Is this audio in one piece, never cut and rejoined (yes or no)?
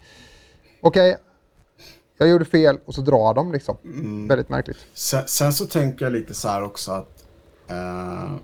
yes